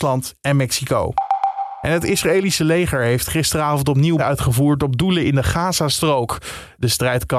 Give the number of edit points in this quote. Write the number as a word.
one